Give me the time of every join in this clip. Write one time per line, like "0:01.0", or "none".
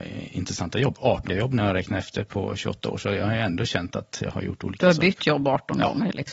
0:01.3